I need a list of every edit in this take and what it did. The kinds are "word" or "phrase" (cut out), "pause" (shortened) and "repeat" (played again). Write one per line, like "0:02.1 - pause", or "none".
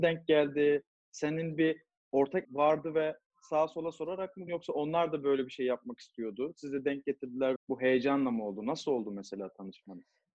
0:02.4 - word
0:04.5 - word
0:07.6 - word